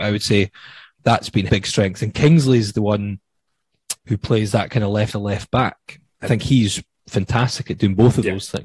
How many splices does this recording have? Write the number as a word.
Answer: four